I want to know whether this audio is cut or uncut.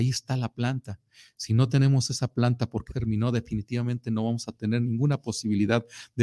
cut